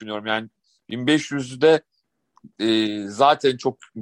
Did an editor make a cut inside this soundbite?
no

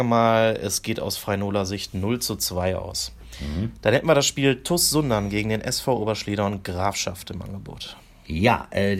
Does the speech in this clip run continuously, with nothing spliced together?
yes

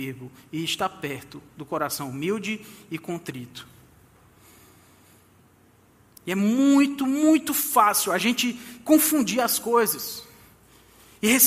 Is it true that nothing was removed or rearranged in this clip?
yes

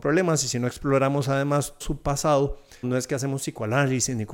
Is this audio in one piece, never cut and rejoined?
no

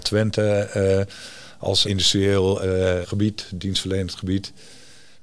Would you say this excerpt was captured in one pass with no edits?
no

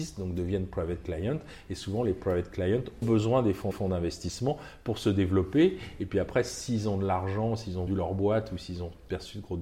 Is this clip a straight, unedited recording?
no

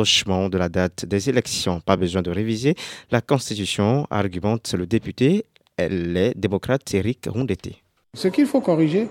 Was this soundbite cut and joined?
no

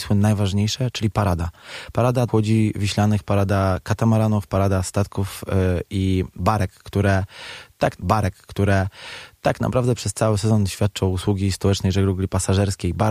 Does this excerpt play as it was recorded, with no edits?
no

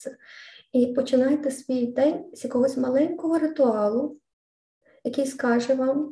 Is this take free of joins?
yes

